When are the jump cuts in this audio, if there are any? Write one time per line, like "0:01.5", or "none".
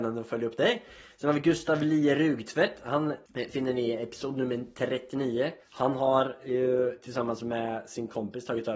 none